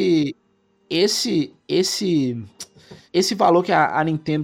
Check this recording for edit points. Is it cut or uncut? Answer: cut